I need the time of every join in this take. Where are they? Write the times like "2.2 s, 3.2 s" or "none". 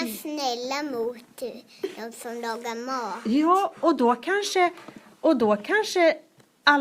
none